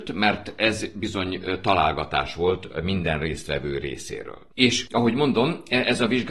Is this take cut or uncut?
uncut